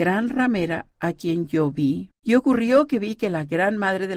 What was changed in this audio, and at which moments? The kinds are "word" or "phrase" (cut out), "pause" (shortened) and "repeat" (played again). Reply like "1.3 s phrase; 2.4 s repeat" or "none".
2.1 s pause